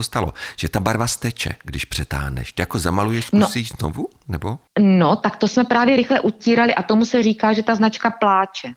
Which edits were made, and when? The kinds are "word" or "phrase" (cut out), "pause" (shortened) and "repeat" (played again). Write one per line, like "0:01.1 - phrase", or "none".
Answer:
0:04.7 - pause